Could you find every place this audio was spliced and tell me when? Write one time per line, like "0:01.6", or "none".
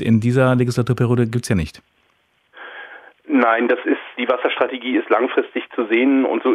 none